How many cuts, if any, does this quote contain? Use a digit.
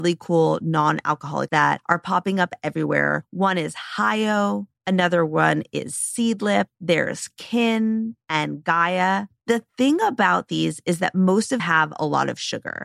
2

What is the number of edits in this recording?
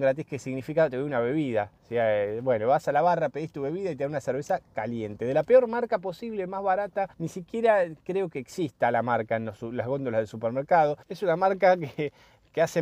2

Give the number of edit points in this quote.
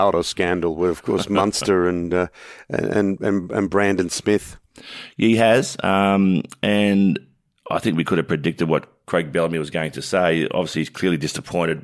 0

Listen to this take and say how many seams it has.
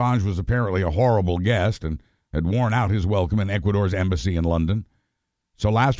0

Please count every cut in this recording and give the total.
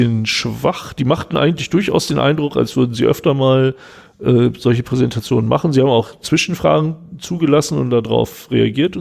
0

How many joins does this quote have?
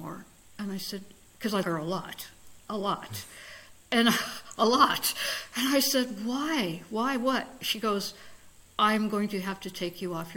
2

